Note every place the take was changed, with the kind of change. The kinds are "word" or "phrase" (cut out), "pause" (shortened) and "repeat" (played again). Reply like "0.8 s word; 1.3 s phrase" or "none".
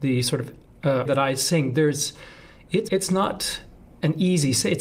1.1 s word; 2.9 s word